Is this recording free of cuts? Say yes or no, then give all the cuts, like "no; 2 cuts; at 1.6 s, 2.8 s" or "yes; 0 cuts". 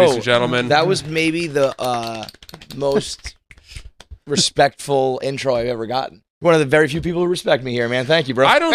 no; 1 cut; at 6.3 s